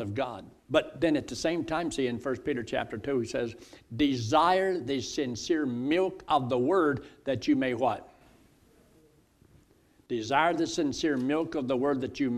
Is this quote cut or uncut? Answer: uncut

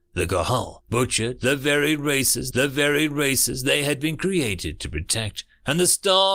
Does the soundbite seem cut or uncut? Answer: cut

